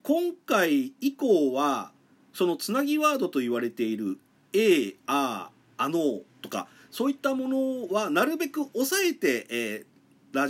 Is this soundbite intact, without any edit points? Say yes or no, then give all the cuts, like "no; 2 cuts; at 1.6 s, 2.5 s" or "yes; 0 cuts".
no; 1 cut; at 6.3 s